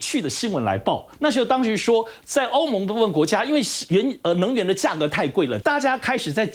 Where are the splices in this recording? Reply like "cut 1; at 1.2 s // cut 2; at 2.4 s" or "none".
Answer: cut 1; at 5.6 s